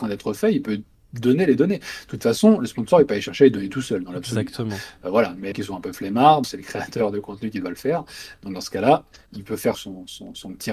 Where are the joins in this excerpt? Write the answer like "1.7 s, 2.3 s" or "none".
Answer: 5.5 s, 6.4 s, 9.7 s